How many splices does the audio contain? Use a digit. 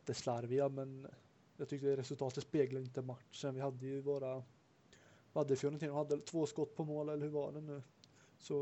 0